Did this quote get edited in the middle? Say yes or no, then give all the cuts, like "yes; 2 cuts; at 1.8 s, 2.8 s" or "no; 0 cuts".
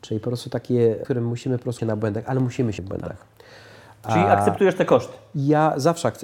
yes; 3 cuts; at 1.0 s, 1.8 s, 2.8 s